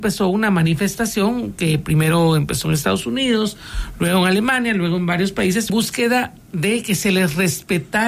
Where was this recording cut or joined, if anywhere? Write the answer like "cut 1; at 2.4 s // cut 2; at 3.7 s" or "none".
cut 1; at 5.7 s